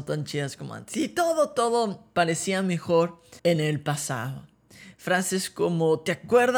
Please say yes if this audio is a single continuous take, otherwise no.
no